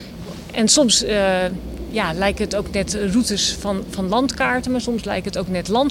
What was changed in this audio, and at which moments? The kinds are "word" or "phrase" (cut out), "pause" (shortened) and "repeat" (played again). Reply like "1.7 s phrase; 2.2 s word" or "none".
none